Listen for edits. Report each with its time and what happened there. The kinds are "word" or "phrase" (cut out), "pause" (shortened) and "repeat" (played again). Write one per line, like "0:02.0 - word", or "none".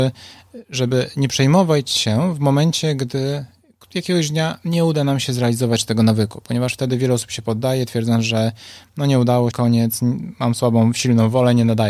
0:09.5 - word